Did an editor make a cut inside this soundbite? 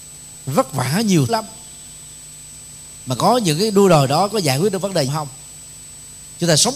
yes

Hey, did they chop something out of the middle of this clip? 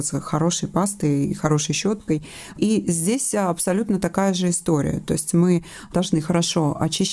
no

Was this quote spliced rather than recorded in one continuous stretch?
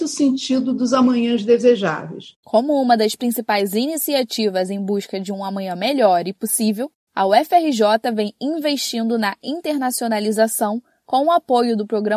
no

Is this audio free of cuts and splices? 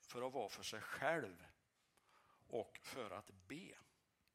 yes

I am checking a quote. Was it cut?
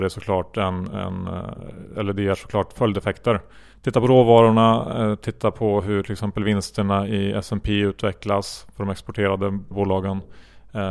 yes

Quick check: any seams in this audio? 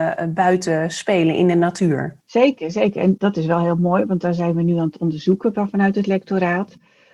yes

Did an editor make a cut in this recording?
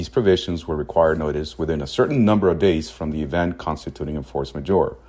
no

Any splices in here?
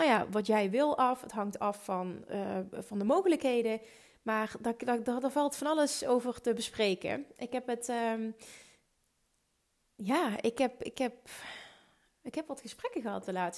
no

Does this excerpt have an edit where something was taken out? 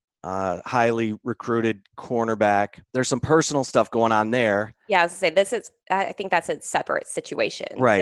yes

